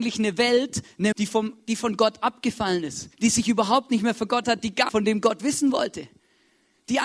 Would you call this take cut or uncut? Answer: cut